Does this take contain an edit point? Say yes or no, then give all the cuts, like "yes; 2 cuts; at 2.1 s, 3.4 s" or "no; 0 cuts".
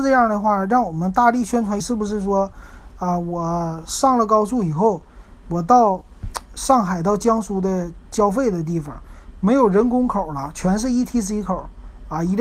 yes; 1 cut; at 1.8 s